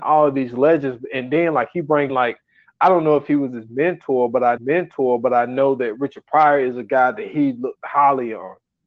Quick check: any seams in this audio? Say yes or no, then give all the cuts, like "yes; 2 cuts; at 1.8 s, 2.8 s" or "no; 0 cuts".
yes; 2 cuts; at 2.1 s, 4.6 s